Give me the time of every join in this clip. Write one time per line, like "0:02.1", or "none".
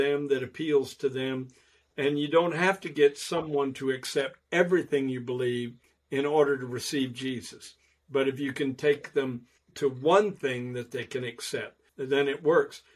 0:09.6
0:11.9